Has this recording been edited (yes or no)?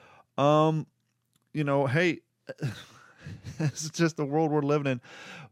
no